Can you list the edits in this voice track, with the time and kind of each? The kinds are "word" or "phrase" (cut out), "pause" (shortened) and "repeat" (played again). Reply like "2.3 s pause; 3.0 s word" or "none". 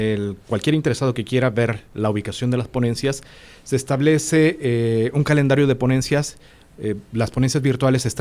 none